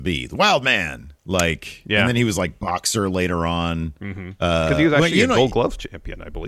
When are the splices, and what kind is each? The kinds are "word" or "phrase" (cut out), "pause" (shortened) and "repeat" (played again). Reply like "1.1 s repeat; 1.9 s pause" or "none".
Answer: 1.2 s pause